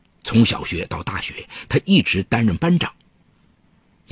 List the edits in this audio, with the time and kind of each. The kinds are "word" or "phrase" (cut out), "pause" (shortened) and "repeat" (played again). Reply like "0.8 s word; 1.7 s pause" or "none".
none